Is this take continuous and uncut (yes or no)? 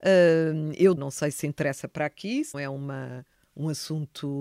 no